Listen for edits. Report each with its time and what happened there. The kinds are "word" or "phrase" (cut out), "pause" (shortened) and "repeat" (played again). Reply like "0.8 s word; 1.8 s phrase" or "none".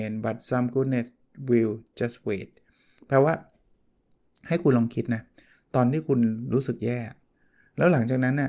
none